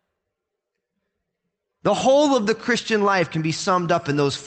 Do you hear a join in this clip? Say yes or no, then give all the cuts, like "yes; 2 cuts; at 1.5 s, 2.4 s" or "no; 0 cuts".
no; 0 cuts